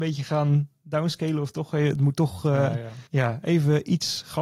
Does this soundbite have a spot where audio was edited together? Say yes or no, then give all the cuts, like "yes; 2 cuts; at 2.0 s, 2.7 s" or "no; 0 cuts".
yes; 1 cut; at 3.1 s